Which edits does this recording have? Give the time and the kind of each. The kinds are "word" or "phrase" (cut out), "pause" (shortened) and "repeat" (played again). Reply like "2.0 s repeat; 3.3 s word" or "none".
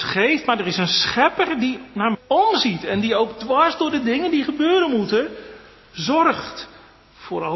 2.1 s word